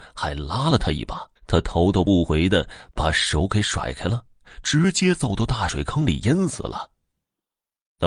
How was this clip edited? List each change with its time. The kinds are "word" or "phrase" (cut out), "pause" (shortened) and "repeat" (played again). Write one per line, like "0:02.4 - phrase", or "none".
0:01.4 - pause